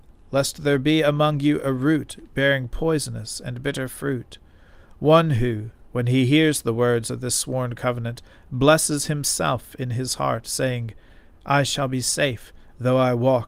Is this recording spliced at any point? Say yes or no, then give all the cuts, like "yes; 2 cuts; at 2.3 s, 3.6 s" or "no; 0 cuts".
no; 0 cuts